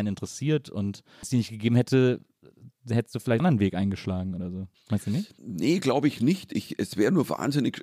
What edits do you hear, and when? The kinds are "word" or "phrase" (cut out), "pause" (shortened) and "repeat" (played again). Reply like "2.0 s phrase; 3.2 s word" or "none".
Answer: 1.2 s word; 3.4 s word; 4.7 s pause; 5.4 s pause

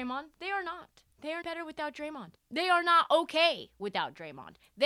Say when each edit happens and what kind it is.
1.1 s pause; 1.4 s word; 2.4 s pause

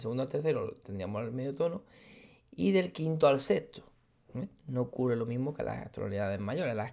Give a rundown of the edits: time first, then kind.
none

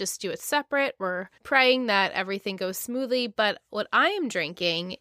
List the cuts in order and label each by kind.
1.4 s pause

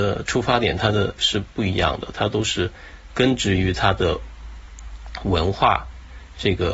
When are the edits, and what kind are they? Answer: 1.2 s word

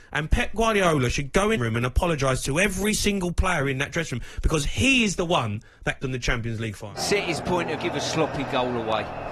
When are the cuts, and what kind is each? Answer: 1.6 s phrase; 6.0 s word; 7.8 s phrase

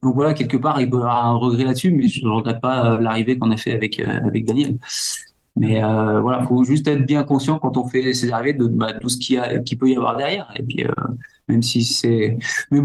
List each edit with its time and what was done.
none

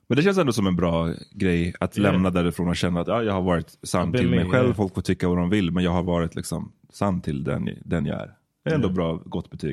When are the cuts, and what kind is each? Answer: none

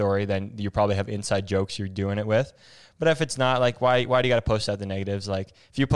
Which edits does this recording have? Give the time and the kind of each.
none

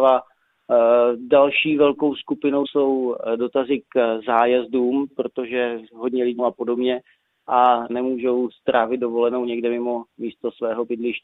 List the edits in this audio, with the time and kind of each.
2.6 s word; 6.4 s phrase; 7.9 s phrase

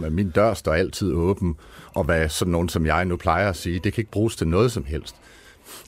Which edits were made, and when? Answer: none

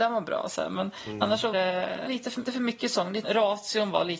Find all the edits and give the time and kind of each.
1.5 s word; 2.1 s word; 2.5 s word; 3.2 s word

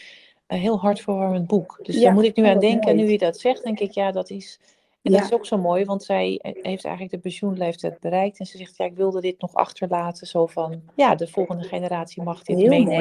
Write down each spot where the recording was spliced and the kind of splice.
10.9 s pause

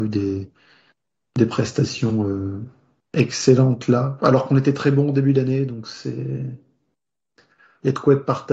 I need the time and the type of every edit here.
none

